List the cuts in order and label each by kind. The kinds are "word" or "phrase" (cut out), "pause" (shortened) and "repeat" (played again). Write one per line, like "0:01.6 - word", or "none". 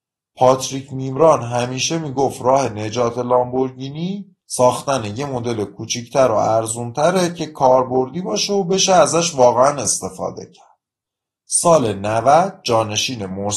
none

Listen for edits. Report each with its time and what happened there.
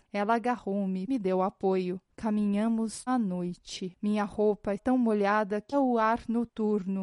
0:01.1 - phrase
0:03.1 - word
0:04.8 - word
0:05.7 - word

